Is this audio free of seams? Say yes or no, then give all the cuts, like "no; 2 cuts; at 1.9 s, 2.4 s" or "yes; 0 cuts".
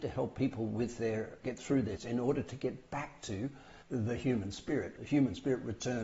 no; 4 cuts; at 1.4 s, 2.0 s, 3.8 s, 5.0 s